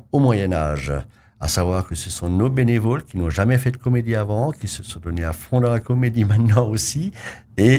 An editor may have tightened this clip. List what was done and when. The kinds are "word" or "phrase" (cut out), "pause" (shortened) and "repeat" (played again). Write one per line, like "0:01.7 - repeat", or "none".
none